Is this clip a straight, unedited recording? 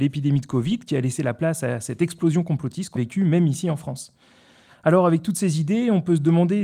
no; 1 cut; at 2.9 s

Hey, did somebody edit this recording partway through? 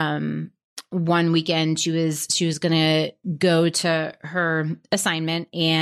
no; 0 cuts

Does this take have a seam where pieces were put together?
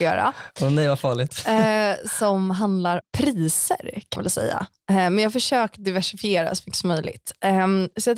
yes; 2 cuts; at 3.0 s, 4.2 s

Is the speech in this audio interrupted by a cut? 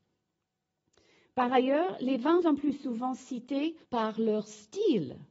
yes; 2 cuts; at 2.4 s, 3.8 s

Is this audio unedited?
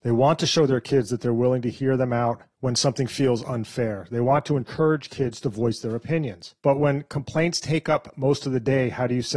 no; 2 cuts; at 2.5 s, 6.6 s

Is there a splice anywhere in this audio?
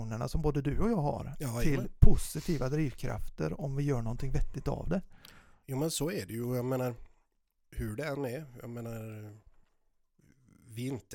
no; 0 cuts

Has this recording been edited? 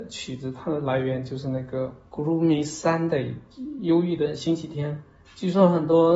no; 0 cuts

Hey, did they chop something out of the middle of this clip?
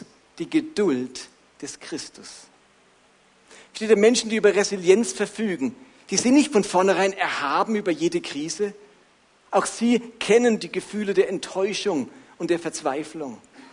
no; 0 cuts

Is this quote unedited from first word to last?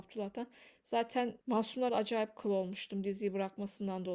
no; 1 cut; at 1.9 s

